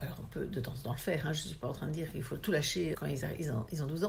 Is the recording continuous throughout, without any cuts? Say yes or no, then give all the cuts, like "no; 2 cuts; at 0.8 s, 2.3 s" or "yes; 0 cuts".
no; 1 cut; at 2.9 s